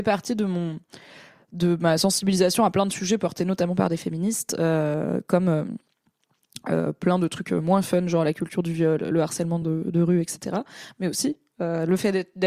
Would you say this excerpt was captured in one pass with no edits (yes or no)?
yes